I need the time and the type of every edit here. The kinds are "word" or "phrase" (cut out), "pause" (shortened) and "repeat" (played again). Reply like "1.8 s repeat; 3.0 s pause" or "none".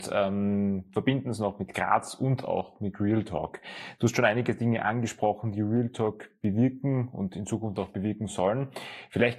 none